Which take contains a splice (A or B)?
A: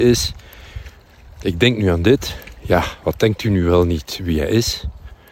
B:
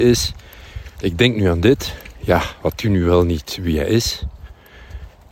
B